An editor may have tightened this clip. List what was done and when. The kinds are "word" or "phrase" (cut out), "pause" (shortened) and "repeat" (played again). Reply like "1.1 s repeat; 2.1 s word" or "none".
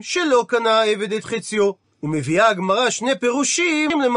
1.9 s pause